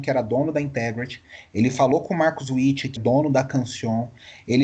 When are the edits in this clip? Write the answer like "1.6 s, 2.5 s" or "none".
3.0 s